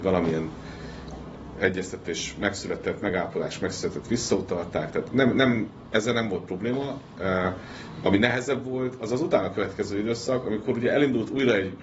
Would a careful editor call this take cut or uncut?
uncut